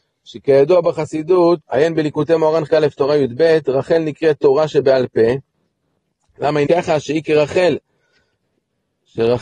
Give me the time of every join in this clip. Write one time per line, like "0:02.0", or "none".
0:01.6
0:02.7
0:06.7